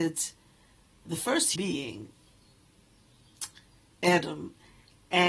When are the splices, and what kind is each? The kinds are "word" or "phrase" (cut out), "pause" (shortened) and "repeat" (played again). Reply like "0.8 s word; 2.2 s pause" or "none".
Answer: 1.1 s word; 1.6 s word

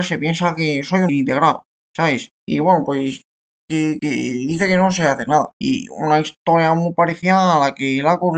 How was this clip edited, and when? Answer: 1.1 s word; 2.4 s pause; 4.0 s word; 5.5 s pause

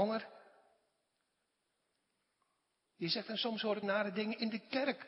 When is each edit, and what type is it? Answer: 3.8 s phrase

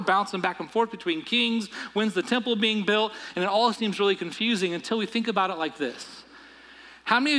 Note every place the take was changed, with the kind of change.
none

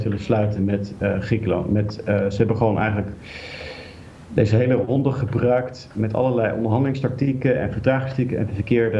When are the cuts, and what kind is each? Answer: none

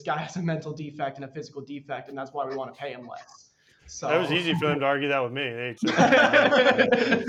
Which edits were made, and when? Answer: 5.8 s word

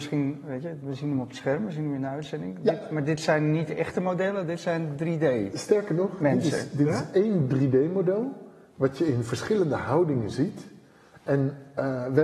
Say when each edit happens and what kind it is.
none

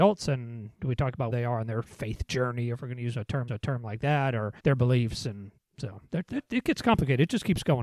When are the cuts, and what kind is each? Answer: 1.3 s word; 3.5 s repeat; 4.6 s pause; 5.6 s pause

